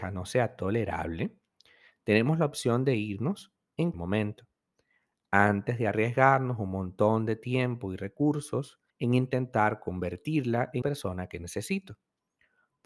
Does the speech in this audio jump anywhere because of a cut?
yes; 3 cuts; at 3.9 s, 8.9 s, 10.8 s

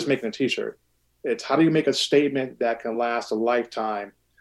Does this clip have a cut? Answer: no; 0 cuts

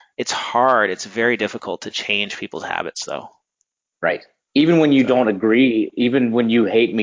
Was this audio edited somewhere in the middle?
no; 0 cuts

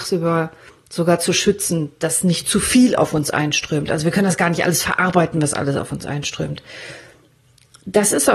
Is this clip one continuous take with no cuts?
yes; 0 cuts

